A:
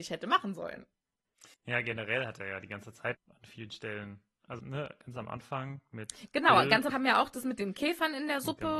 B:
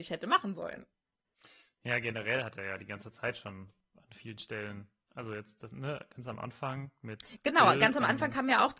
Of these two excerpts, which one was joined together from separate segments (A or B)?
A